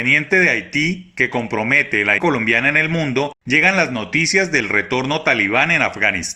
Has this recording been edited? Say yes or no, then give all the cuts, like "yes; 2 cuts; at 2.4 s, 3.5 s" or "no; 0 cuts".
yes; 1 cut; at 2.2 s